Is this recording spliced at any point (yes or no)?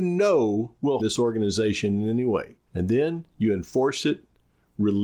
yes